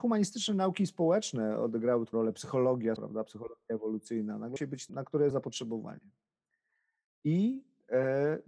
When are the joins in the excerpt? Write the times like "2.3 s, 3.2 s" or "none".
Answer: 2.1 s, 3.0 s, 4.6 s, 4.9 s, 5.3 s